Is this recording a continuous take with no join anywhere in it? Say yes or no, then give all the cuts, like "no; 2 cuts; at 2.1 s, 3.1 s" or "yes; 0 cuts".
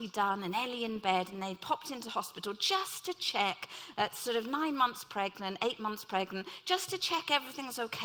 yes; 0 cuts